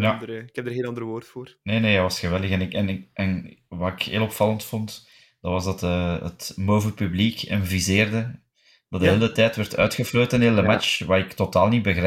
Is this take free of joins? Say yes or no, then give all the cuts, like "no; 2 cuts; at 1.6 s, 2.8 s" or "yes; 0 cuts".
yes; 0 cuts